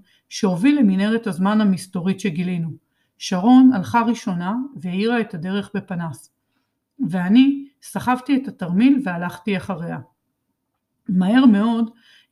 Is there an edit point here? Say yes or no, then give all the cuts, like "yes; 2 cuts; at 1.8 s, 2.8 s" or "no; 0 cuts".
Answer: no; 0 cuts